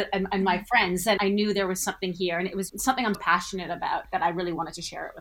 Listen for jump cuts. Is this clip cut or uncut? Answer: cut